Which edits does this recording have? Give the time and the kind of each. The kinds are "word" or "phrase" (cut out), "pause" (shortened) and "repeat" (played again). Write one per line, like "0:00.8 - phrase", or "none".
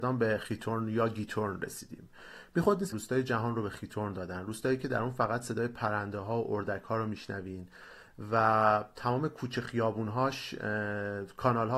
0:02.9 - phrase